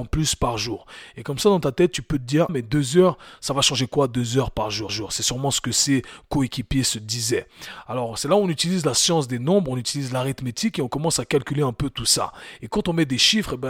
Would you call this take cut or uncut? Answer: cut